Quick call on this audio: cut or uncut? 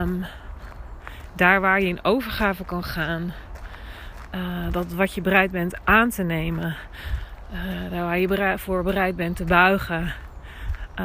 uncut